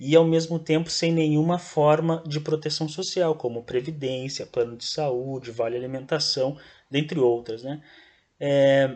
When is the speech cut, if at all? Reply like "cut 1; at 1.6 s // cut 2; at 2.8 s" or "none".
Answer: none

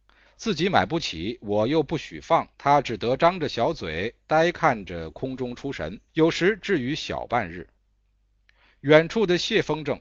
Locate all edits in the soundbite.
cut 1; at 2.5 s // cut 2; at 6.1 s

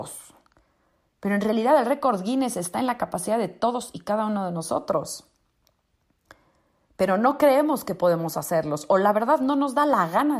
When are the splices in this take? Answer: none

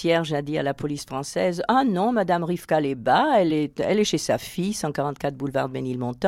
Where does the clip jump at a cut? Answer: none

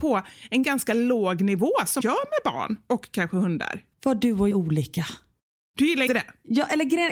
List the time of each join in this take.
cut 1; at 2.0 s // cut 2; at 3.9 s // cut 3; at 4.5 s // cut 4; at 6.1 s

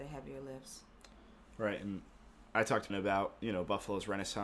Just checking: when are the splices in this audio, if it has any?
cut 1; at 2.9 s

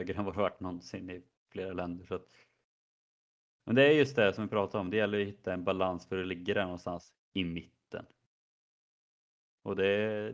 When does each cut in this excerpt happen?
none

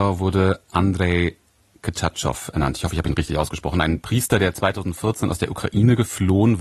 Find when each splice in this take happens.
none

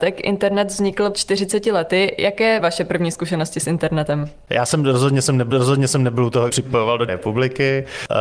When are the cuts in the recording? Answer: cut 1; at 1.1 s // cut 2; at 2.6 s // cut 3; at 5.5 s // cut 4; at 6.5 s // cut 5; at 7.1 s

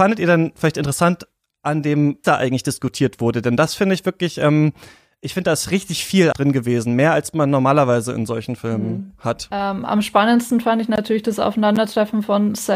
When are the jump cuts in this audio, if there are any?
cut 1; at 2.2 s // cut 2; at 6.3 s

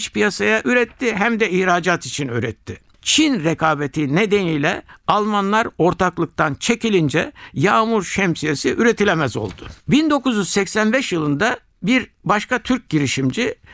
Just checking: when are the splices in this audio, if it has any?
cut 1; at 9.8 s

